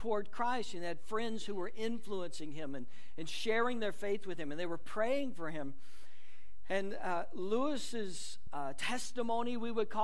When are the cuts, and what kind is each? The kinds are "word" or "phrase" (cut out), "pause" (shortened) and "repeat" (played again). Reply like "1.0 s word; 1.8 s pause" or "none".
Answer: none